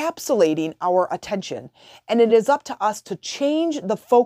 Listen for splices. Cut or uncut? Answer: uncut